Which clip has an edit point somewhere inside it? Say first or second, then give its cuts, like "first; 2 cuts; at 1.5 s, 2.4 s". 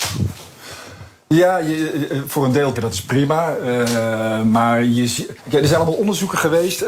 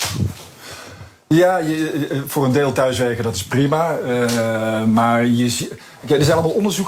first; 2 cuts; at 2.7 s, 5.4 s